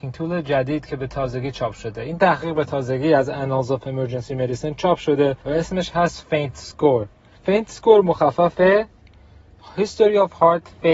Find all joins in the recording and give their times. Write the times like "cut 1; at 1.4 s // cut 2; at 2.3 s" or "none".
cut 1; at 5.4 s // cut 2; at 7.3 s // cut 3; at 8.5 s